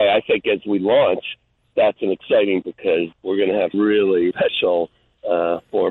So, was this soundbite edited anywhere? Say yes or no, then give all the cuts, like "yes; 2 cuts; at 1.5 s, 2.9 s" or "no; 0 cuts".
yes; 5 cuts; at 1.7 s, 2.6 s, 3.1 s, 3.7 s, 4.3 s